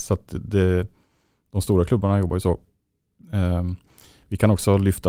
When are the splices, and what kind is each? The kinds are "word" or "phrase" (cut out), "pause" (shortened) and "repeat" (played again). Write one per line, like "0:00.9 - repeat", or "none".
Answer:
none